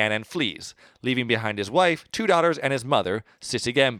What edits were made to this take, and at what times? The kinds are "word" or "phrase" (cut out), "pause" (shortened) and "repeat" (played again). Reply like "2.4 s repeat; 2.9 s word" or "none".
none